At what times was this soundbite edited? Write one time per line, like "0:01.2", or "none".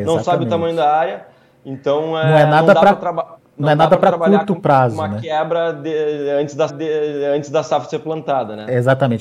0:06.7